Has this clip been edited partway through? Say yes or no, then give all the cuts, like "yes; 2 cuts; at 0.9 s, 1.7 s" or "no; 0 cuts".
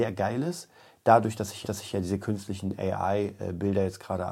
yes; 1 cut; at 1.6 s